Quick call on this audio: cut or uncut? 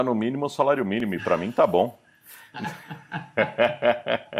uncut